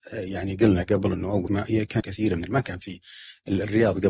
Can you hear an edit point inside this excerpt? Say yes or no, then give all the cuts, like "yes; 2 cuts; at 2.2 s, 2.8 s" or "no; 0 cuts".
yes; 3 cuts; at 1.5 s, 2.0 s, 2.5 s